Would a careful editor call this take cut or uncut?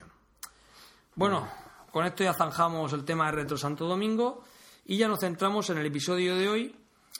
uncut